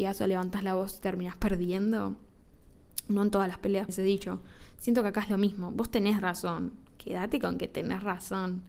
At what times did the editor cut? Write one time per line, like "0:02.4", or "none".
0:03.9